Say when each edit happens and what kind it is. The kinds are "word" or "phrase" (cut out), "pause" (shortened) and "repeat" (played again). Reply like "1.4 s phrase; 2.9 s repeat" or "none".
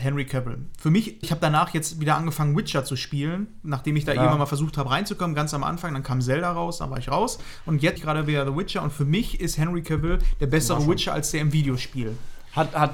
1.2 s word; 8.0 s word